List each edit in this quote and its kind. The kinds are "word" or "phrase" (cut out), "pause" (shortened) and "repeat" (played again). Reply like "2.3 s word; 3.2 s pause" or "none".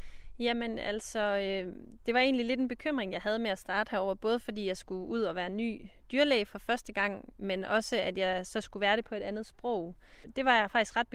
none